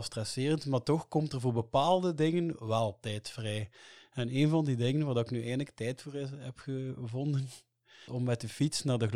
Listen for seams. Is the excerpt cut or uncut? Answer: cut